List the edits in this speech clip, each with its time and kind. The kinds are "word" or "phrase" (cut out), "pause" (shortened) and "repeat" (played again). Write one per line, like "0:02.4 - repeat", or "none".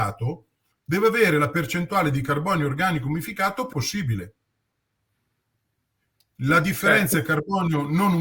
0:03.7 - word